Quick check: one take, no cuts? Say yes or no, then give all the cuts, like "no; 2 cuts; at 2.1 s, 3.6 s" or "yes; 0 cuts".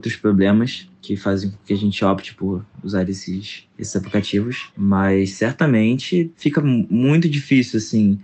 no; 1 cut; at 0.9 s